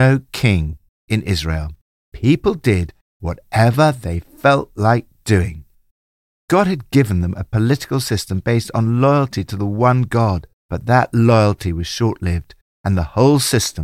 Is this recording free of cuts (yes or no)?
yes